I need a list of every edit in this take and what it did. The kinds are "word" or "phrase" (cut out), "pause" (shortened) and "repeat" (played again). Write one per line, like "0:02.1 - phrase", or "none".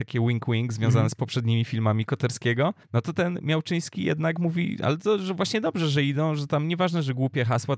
0:02.8 - pause